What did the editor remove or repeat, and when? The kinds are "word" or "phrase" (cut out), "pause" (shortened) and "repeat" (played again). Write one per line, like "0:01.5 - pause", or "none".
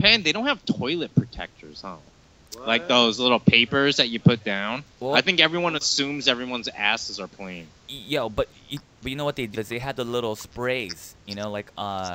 0:04.9 - pause
0:07.3 - word
0:09.5 - word